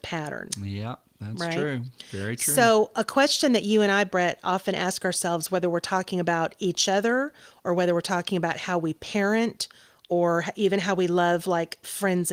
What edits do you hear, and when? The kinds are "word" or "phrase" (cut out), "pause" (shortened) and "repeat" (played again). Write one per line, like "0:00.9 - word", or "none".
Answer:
none